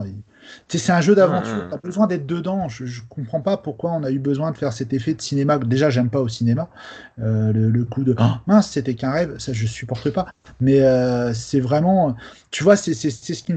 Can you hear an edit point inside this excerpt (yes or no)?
no